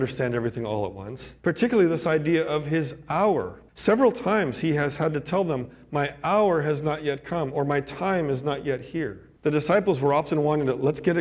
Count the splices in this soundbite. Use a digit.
3